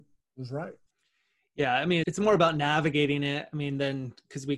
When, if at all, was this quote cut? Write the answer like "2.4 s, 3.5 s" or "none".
2.0 s